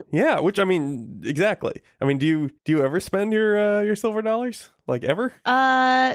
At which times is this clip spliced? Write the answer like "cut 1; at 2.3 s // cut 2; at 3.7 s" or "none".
cut 1; at 2.6 s